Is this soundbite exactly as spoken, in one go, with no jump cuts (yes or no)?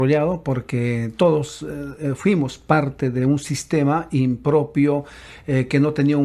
yes